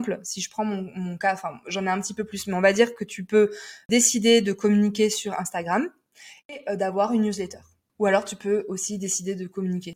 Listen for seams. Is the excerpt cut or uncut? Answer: uncut